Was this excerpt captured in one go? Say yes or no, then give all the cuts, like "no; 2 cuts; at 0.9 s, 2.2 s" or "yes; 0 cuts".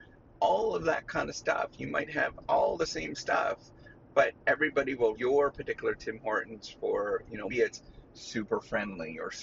no; 2 cuts; at 5.1 s, 7.5 s